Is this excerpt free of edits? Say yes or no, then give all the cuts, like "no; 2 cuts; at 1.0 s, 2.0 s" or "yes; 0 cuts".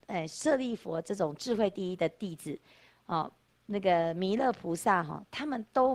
yes; 0 cuts